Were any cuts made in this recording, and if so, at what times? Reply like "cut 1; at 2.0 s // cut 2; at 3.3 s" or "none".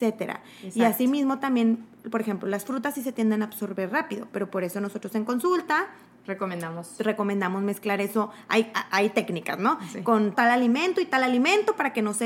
cut 1; at 10.3 s